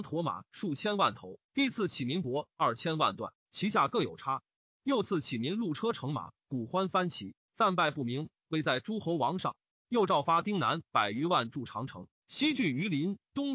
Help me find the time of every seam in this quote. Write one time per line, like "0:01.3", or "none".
0:01.4

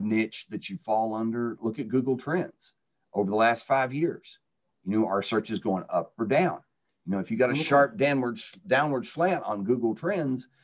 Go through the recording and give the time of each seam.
none

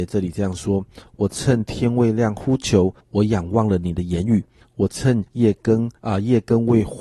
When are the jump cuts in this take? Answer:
0:03.0
0:04.6
0:05.3
0:06.0

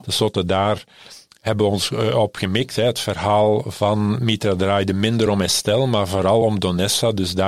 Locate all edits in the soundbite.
none

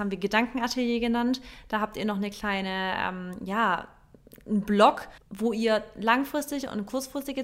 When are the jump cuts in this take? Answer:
0:05.2

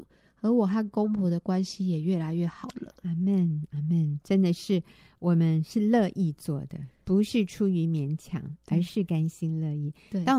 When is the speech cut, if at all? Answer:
none

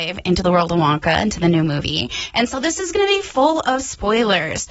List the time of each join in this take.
none

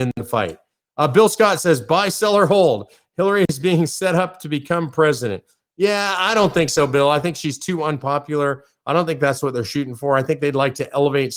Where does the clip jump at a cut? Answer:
none

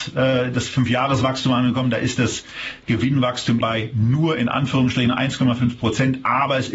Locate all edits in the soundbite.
0:03.6

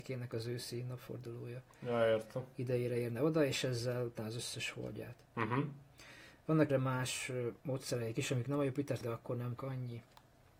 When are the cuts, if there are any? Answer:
0:04.2
0:05.2
0:06.7
0:07.6
0:09.0
0:09.6

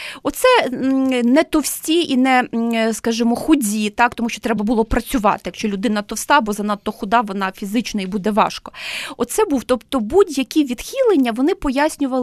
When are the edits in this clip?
none

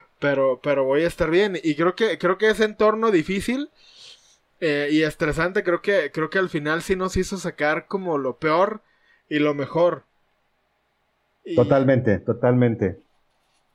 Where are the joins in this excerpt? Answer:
none

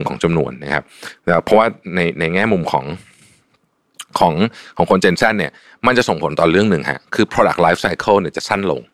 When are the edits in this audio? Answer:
none

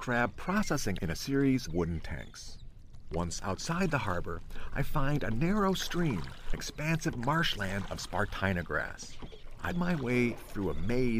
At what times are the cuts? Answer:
0:01.0
0:01.7
0:06.5
0:09.7

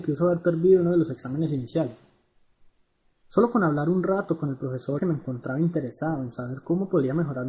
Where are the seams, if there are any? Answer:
0:05.0

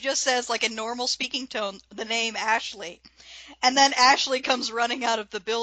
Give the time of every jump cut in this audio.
none

